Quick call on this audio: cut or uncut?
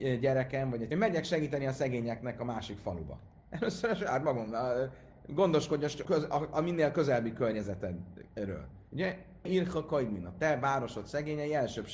cut